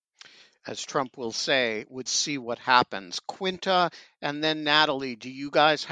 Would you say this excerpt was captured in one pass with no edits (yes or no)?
no